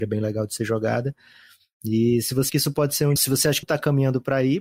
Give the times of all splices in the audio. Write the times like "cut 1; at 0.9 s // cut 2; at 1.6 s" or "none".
cut 1; at 2.5 s // cut 2; at 3.2 s // cut 3; at 3.6 s